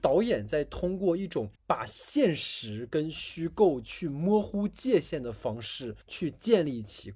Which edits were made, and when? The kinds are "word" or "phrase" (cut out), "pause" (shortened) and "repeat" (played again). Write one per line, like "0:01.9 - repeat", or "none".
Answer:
0:01.6 - pause
0:06.0 - pause